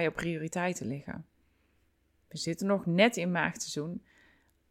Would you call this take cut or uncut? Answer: uncut